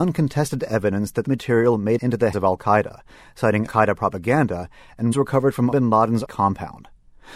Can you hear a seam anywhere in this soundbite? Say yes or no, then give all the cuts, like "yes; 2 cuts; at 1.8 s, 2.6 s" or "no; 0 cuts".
yes; 7 cuts; at 1.3 s, 2.0 s, 2.3 s, 3.7 s, 5.1 s, 5.7 s, 6.2 s